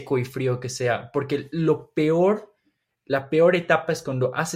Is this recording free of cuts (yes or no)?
yes